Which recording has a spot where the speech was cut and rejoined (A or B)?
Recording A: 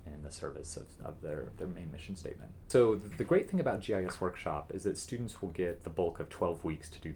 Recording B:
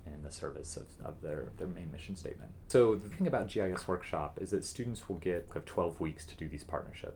B